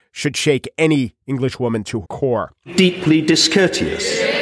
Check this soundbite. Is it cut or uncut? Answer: cut